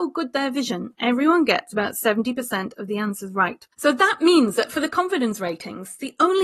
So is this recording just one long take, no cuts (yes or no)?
no